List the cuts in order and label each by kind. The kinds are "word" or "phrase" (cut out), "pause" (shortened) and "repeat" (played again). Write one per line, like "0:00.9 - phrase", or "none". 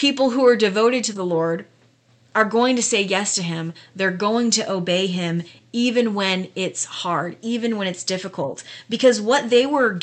none